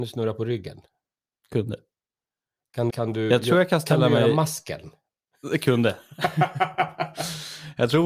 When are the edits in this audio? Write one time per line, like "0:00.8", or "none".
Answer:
0:02.9

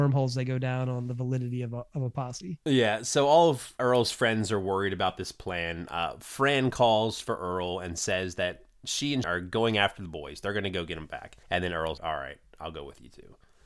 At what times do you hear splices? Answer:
0:03.8
0:09.2
0:11.4
0:12.0

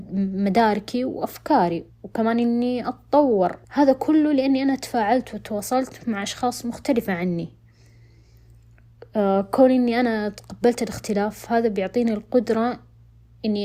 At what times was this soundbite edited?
0:01.9
0:03.6

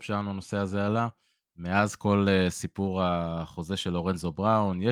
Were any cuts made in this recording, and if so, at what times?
none

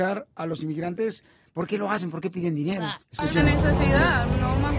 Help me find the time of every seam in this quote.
0:03.0

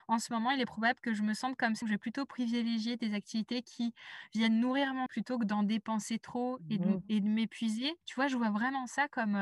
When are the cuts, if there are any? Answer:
0:01.8
0:05.1
0:08.0

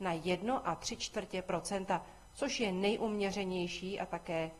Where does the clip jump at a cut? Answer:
none

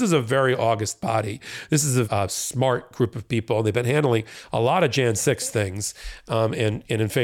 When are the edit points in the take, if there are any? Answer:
0:02.0

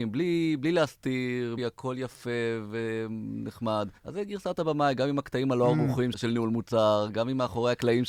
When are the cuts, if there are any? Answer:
0:01.6
0:04.0
0:06.1

